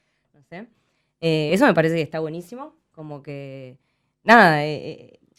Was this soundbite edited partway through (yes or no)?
no